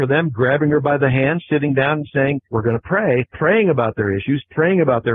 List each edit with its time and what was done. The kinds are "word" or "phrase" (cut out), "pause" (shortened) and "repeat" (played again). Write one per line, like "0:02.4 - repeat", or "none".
0:02.4 - pause
0:03.3 - pause